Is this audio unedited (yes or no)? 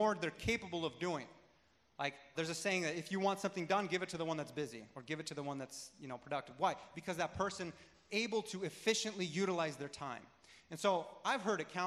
no